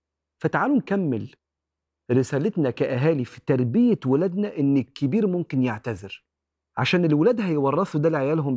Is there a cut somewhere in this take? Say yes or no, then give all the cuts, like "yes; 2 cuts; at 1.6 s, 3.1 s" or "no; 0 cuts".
no; 0 cuts